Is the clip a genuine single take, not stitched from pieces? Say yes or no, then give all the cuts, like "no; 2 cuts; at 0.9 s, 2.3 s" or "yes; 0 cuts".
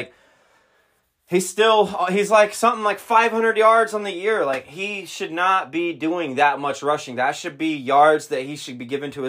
yes; 0 cuts